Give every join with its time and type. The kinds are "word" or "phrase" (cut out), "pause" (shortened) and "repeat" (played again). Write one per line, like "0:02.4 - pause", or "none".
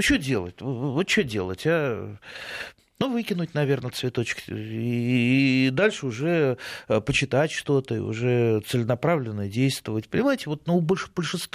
none